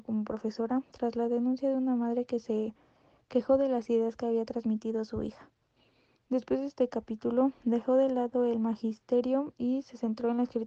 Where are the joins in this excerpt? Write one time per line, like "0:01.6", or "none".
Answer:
none

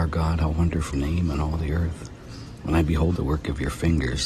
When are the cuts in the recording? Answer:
0:00.9
0:03.2

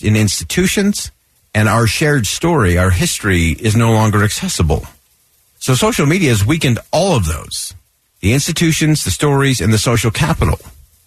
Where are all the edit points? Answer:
0:01.2
0:05.3
0:08.0

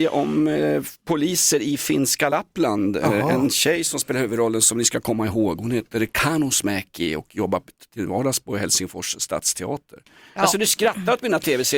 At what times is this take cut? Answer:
none

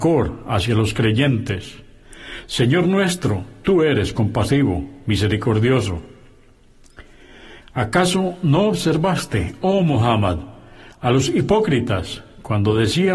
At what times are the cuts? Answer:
none

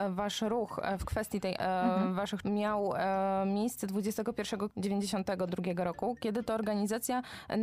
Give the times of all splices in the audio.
0:01.6
0:02.4
0:04.7

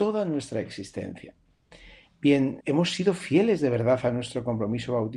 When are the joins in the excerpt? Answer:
0:02.6

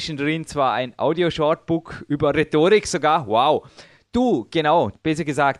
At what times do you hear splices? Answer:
none

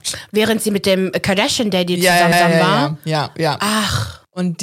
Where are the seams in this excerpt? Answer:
0:02.3

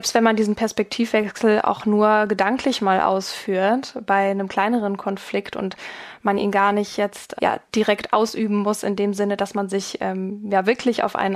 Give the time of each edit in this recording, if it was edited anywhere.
0:07.4

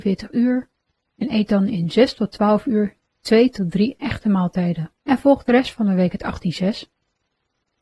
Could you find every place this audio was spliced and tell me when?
0:05.0

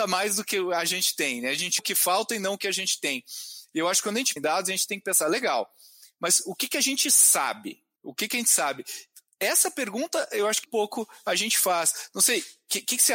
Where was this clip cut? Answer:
0:01.8
0:04.4
0:10.6

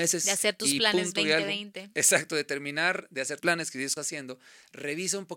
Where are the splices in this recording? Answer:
0:03.4
0:04.0

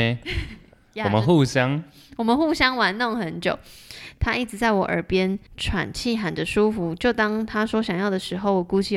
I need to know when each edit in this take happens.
0:05.5

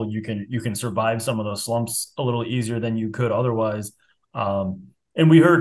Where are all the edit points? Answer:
none

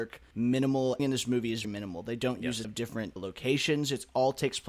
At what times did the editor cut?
0:01.0
0:01.6
0:02.6
0:03.2

